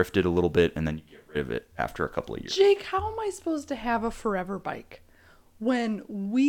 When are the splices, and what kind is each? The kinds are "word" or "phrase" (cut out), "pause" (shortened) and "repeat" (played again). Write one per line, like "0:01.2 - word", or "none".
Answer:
none